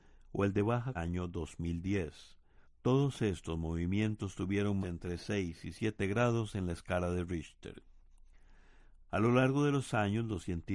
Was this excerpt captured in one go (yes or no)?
no